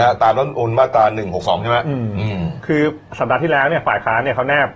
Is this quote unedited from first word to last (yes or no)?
no